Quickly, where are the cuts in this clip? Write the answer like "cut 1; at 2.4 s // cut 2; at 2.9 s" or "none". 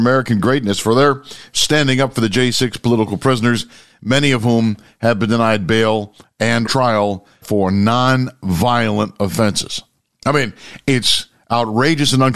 cut 1; at 6.6 s // cut 2; at 7.4 s